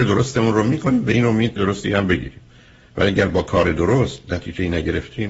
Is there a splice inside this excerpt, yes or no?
yes